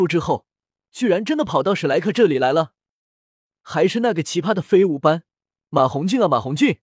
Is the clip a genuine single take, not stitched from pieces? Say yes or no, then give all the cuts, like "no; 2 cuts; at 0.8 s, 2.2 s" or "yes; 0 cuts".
yes; 0 cuts